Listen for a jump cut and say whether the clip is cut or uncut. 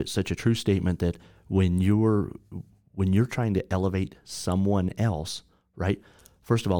uncut